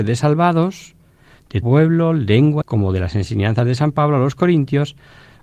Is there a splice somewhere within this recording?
yes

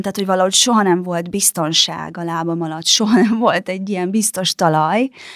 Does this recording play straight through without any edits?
yes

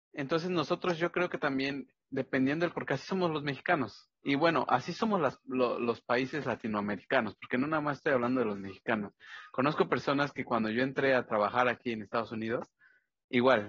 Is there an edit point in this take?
yes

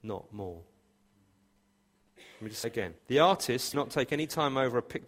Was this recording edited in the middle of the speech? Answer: yes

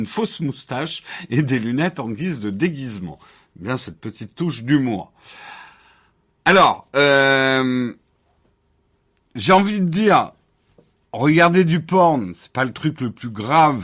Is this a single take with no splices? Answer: yes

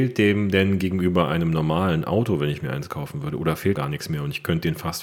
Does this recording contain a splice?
yes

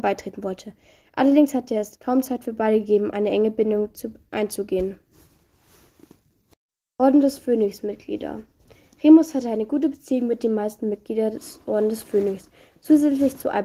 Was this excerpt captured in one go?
yes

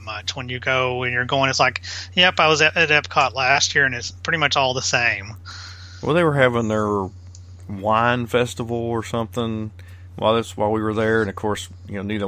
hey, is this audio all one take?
yes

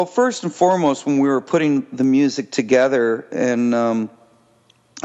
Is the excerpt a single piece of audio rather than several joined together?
yes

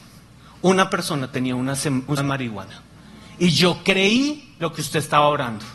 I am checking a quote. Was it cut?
yes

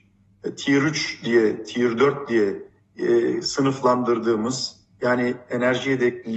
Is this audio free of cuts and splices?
yes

